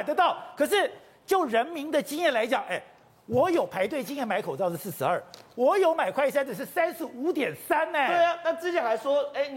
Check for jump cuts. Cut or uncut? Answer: uncut